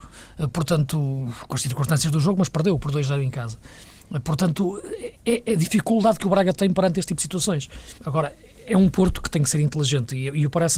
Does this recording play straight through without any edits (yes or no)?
no